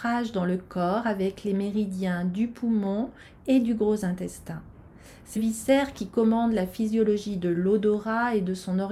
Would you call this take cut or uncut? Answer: cut